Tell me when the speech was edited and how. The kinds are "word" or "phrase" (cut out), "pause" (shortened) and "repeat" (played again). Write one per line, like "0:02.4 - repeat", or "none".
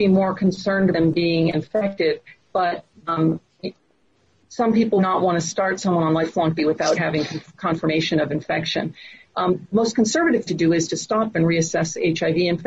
0:00.9 - word
0:01.5 - word
0:03.0 - word
0:05.0 - word
0:06.6 - word
0:06.9 - word
0:09.7 - word
0:10.5 - word
0:11.3 - word